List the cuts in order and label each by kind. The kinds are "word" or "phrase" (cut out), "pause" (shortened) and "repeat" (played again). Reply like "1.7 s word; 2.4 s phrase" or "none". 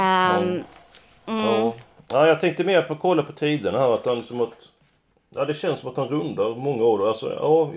none